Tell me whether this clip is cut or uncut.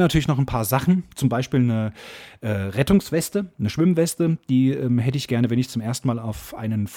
uncut